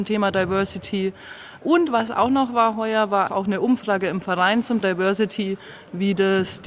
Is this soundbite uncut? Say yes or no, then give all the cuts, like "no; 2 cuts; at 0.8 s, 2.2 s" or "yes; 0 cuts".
no; 2 cuts; at 3.3 s, 4.8 s